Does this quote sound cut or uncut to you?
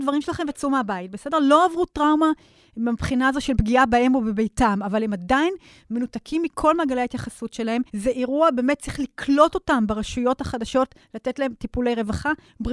cut